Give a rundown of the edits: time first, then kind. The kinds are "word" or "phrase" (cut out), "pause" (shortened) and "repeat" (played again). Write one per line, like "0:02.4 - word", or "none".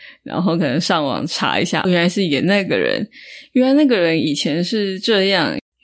0:01.8 - word